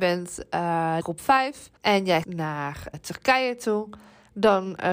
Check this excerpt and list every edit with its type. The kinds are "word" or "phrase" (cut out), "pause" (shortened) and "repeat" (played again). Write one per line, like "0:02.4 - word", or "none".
0:01.0 - phrase
0:01.8 - pause
0:02.2 - word
0:02.9 - word